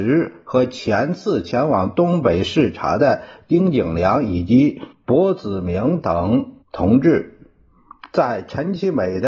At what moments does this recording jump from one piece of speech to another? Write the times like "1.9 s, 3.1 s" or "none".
4.9 s, 6.6 s